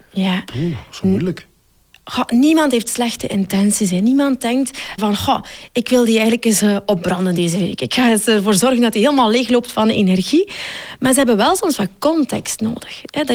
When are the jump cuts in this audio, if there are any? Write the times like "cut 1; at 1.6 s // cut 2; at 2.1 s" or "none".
cut 1; at 5.0 s